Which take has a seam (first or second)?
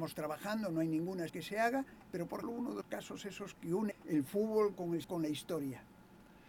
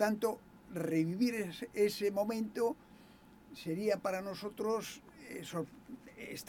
first